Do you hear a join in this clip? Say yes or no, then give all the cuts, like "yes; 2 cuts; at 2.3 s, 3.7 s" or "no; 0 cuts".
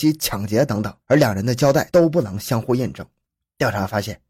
yes; 2 cuts; at 1.0 s, 3.2 s